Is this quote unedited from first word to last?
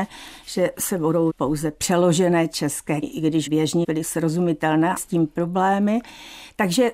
no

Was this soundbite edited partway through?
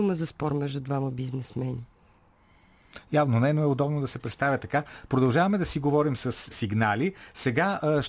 yes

